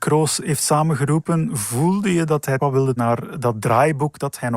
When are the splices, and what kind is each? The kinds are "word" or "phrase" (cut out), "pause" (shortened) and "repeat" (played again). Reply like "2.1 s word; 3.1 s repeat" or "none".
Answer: 2.6 s word; 3.0 s word